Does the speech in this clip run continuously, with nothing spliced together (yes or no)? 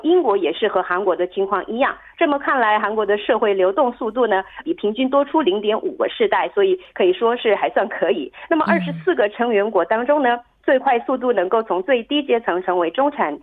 no